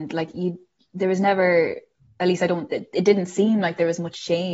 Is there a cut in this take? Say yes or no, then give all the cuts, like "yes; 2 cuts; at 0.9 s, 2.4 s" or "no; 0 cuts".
no; 0 cuts